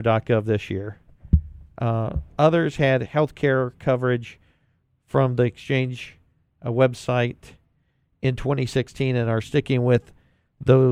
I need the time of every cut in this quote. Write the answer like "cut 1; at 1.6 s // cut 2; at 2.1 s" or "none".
none

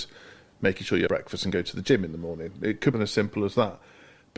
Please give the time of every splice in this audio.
cut 1; at 1.1 s // cut 2; at 2.9 s

